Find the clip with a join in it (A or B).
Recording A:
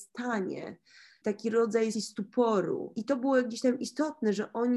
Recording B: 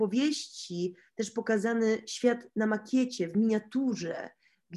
A